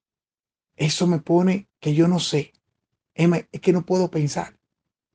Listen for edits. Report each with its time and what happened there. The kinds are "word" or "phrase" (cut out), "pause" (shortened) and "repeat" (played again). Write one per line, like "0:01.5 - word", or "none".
0:01.8 - pause